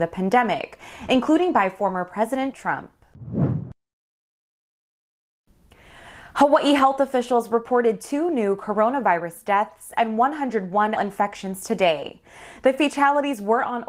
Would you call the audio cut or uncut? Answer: cut